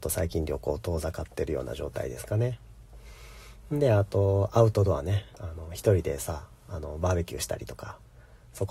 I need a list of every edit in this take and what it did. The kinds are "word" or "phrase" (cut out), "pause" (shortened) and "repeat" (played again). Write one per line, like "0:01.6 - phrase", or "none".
0:05.3 - pause